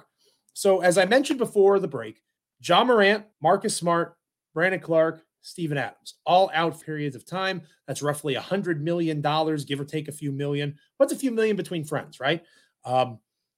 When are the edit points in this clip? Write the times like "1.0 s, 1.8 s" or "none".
2.4 s, 3.3 s, 6.8 s